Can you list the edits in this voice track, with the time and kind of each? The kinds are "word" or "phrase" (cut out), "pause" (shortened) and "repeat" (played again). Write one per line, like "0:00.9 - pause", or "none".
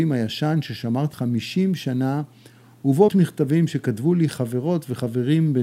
0:01.1 - word
0:03.1 - word